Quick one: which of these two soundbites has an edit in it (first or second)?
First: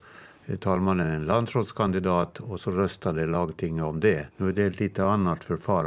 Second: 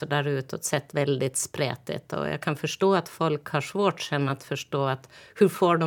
first